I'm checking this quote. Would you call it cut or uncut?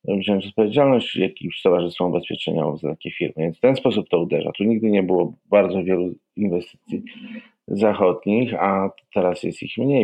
uncut